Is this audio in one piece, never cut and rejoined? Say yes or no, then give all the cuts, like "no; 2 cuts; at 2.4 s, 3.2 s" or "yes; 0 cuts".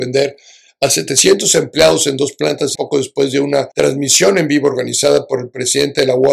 no; 2 cuts; at 2.8 s, 3.7 s